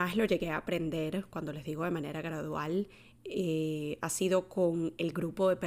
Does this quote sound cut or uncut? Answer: uncut